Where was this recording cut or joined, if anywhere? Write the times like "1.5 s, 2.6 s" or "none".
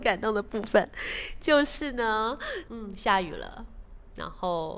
2.7 s